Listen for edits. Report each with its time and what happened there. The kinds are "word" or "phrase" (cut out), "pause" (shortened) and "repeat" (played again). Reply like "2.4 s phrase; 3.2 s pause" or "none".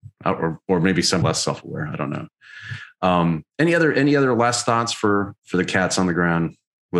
1.2 s phrase